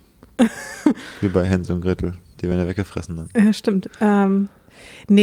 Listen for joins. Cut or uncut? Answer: uncut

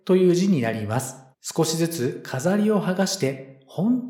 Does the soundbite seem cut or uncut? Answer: cut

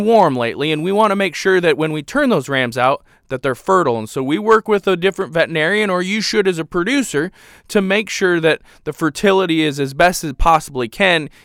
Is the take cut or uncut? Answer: uncut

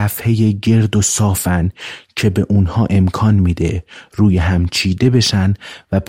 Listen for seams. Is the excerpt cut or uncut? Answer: uncut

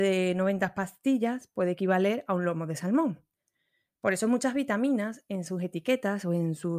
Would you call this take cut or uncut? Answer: uncut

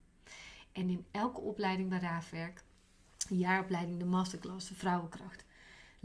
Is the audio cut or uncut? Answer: uncut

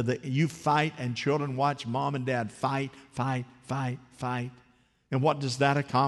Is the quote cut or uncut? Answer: uncut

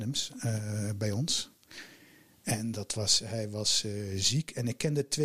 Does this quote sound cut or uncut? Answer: uncut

